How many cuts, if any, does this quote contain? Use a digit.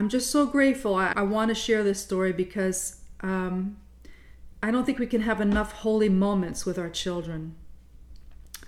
1